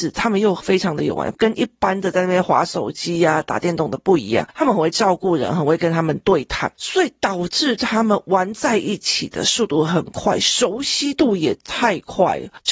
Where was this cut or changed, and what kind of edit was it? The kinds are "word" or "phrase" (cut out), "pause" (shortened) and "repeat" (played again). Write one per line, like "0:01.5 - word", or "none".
0:06.7 - pause

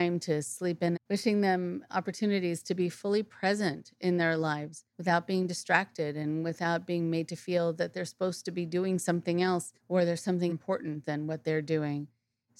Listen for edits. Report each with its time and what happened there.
0:00.9 - phrase
0:01.9 - word
0:04.9 - pause
0:09.8 - pause
0:10.5 - phrase

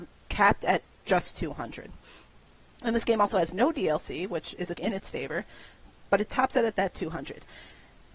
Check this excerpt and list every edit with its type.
0:04.7 - word

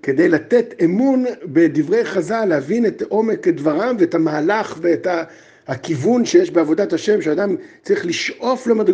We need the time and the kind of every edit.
none

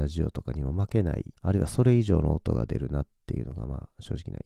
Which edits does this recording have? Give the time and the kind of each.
0:01.3 - pause

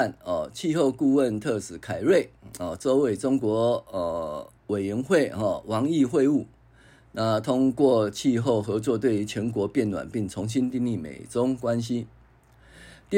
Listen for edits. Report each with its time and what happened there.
0:04.6 - pause

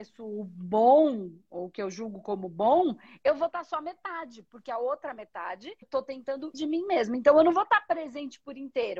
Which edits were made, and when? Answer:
0:05.8 - word
0:06.5 - word

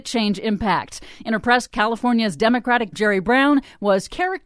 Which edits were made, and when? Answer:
0:01.7 - word
0:02.9 - word

